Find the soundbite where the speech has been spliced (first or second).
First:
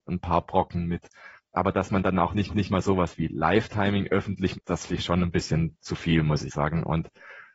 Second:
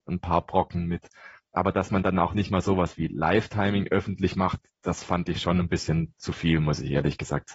first